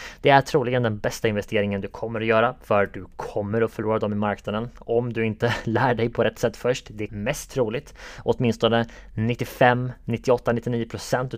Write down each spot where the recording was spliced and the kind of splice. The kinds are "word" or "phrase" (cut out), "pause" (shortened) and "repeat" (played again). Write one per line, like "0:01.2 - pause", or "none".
0:07.1 - phrase